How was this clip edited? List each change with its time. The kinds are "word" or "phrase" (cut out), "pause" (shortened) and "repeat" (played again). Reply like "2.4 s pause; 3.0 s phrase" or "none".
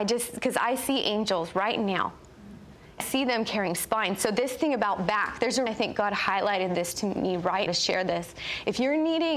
3.0 s word; 5.7 s word; 7.7 s word